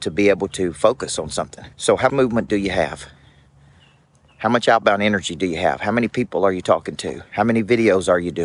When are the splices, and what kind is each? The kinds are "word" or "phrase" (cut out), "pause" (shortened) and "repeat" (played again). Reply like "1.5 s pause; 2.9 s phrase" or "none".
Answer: 1.7 s pause; 2.1 s word